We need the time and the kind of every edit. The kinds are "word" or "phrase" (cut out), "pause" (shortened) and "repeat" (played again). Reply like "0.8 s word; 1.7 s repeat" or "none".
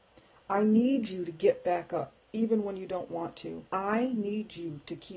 2.2 s pause; 3.7 s pause